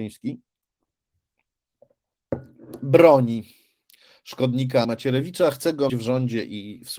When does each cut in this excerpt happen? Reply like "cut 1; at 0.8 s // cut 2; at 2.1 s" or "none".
cut 1; at 4.8 s // cut 2; at 5.9 s